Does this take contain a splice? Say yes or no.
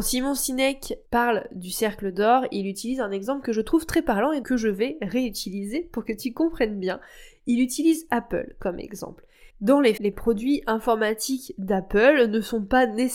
yes